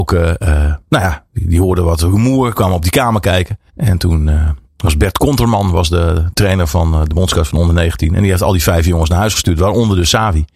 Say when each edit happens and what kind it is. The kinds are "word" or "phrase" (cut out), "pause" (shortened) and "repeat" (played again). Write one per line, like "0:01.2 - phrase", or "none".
0:03.7 - pause
0:04.7 - pause